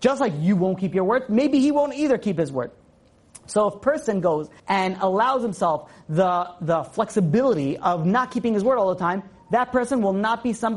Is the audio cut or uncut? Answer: cut